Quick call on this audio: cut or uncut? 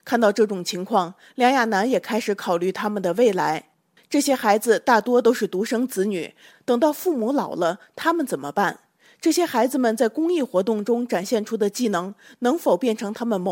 uncut